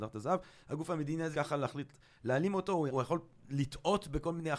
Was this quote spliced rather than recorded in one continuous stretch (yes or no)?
yes